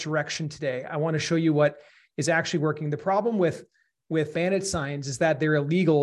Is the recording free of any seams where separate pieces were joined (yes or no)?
no